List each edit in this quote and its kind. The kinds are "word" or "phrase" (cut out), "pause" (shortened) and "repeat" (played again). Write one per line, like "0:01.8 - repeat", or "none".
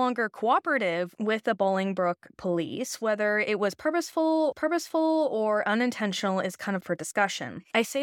0:04.5 - repeat
0:06.8 - word